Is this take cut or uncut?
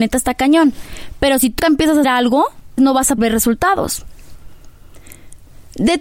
cut